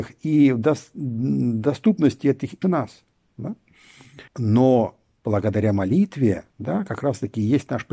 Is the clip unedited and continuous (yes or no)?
no